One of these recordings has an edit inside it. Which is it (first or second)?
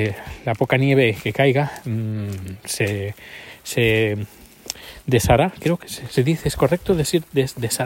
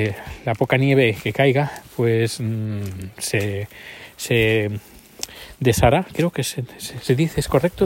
first